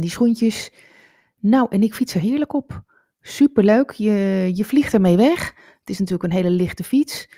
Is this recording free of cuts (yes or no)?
yes